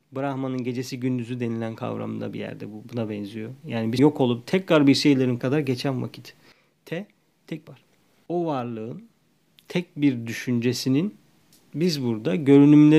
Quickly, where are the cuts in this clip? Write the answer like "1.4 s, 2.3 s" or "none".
4.0 s, 5.4 s, 7.7 s